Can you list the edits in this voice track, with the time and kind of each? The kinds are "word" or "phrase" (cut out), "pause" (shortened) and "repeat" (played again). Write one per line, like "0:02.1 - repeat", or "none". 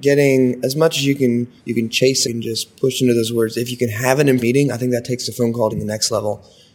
0:01.6 - pause
0:02.2 - phrase
0:04.4 - word
0:05.7 - word